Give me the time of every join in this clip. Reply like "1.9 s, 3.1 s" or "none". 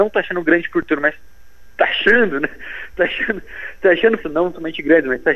4.2 s